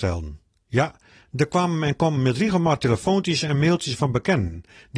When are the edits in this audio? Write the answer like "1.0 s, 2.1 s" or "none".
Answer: none